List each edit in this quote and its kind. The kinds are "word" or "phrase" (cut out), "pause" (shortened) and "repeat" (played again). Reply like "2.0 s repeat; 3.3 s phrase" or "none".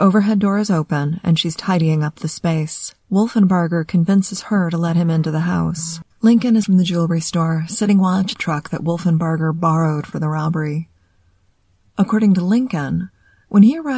3.0 s pause; 6.1 s pause; 6.6 s word; 8.3 s phrase; 10.1 s phrase